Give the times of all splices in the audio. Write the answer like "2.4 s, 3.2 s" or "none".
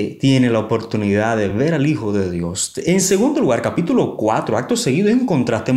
none